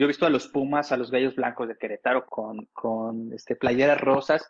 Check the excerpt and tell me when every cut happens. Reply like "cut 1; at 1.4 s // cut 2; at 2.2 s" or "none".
cut 1; at 2.2 s